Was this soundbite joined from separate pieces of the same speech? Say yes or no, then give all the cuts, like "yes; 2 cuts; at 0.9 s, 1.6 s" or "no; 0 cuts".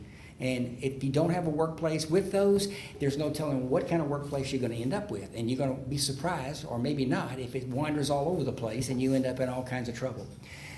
no; 0 cuts